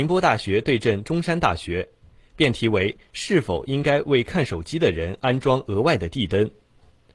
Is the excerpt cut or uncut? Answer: uncut